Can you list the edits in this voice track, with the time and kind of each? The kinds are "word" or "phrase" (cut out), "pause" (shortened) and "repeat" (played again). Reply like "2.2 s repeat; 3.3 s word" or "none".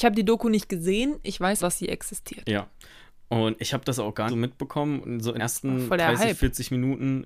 1.6 s word; 4.3 s word; 5.4 s word